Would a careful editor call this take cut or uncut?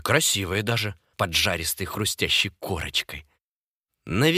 cut